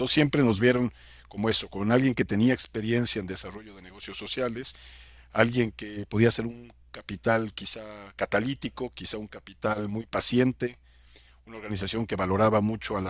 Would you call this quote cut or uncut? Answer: uncut